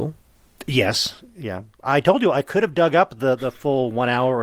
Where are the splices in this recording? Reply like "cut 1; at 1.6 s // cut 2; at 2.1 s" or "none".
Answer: none